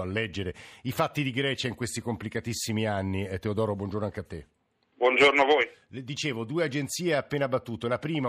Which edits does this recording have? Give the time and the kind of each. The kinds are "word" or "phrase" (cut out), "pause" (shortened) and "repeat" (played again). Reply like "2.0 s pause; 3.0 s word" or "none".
none